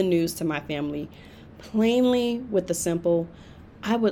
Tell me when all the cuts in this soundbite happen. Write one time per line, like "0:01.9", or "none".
none